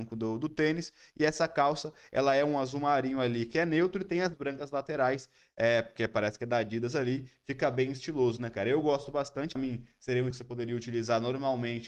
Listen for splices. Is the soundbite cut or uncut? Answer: cut